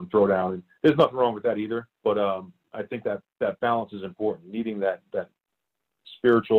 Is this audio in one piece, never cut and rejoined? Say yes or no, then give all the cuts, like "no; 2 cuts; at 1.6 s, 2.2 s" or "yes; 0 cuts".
no; 2 cuts; at 1.9 s, 3.3 s